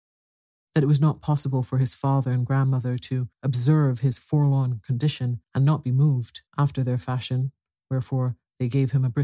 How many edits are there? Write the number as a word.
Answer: three